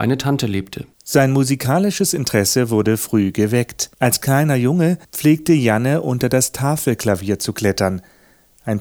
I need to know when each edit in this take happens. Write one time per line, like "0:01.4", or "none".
0:00.9
0:03.9
0:05.0